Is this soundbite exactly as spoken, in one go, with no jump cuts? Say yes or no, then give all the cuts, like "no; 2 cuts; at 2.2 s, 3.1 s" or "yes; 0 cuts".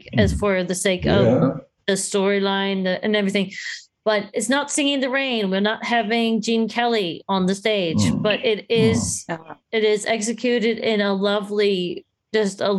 yes; 0 cuts